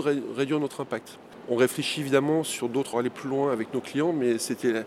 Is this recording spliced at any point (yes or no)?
yes